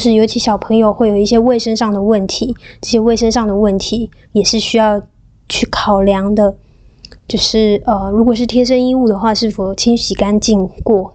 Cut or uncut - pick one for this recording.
uncut